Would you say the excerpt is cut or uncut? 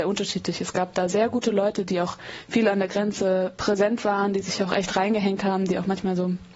uncut